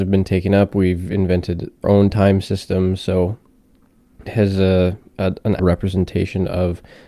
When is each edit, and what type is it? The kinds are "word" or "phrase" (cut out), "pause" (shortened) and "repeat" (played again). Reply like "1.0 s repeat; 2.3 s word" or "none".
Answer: 1.8 s word; 4.3 s word; 5.6 s word